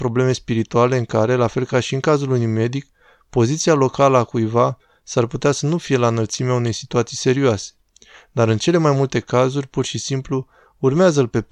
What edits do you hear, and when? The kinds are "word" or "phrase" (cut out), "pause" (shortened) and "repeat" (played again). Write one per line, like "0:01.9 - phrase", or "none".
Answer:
none

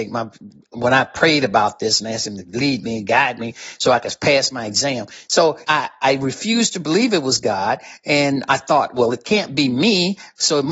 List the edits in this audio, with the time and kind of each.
0:05.6 - pause

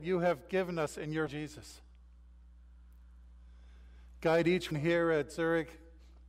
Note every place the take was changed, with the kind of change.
0:01.3 - word
0:04.7 - word

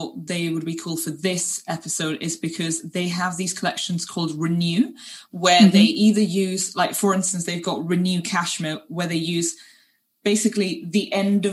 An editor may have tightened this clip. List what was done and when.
none

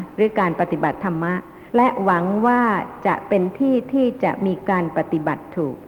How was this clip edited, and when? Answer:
0:01.7 - pause

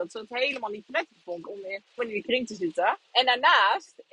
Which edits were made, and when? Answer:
0:01.4 - word
0:02.0 - word
0:03.0 - pause

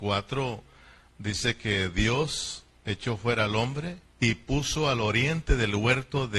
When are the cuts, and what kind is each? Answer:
0:04.1 - pause

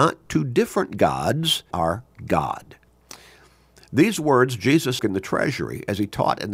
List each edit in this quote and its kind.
0:01.7 - word
0:05.0 - word

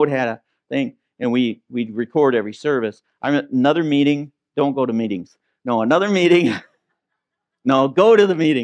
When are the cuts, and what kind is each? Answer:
none

